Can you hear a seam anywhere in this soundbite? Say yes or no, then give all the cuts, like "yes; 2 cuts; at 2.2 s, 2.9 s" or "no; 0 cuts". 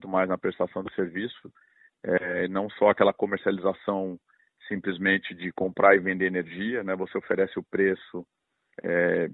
no; 0 cuts